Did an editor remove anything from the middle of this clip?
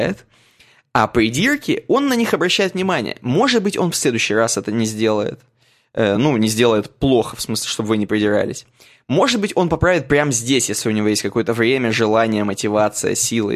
no; 0 cuts

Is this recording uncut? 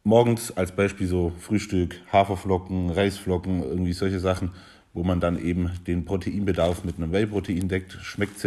yes; 0 cuts

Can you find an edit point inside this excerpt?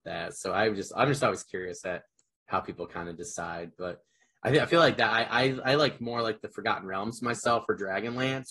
no; 0 cuts

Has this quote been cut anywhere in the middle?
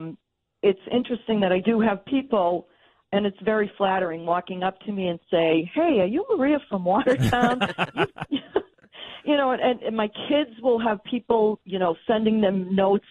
no; 0 cuts

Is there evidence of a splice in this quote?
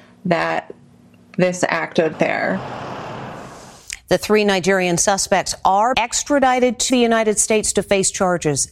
yes; 3 cuts; at 2.1 s, 5.9 s, 6.9 s

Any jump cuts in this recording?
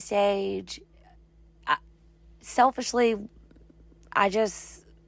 no; 0 cuts

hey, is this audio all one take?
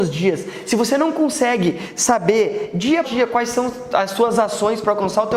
no; 1 cut; at 3.0 s

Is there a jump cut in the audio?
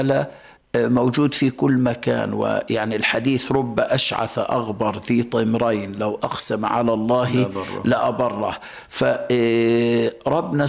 no; 0 cuts

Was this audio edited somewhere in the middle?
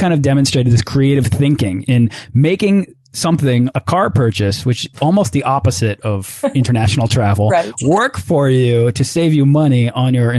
yes; 3 cuts; at 1.8 s, 3.7 s, 4.9 s

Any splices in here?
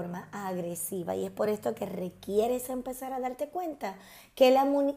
no; 0 cuts

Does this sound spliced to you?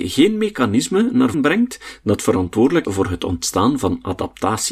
yes; 2 cuts; at 1.3 s, 2.8 s

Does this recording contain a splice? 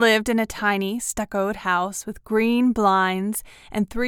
no; 0 cuts

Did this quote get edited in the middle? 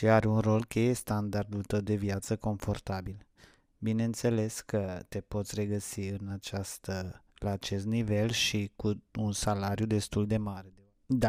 no; 0 cuts

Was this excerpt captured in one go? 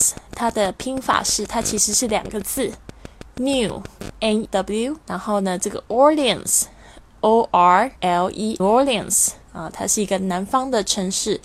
no; 5 cuts; at 4.4 s, 5.0 s, 8.0 s, 8.6 s, 9.4 s

